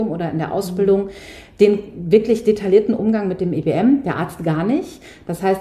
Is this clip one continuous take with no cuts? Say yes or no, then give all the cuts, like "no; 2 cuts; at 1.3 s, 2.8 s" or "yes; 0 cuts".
yes; 0 cuts